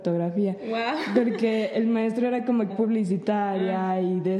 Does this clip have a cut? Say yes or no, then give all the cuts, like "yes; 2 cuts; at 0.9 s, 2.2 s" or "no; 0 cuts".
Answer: yes; 1 cut; at 2.7 s